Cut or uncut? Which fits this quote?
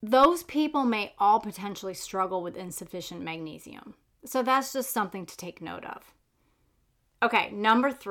uncut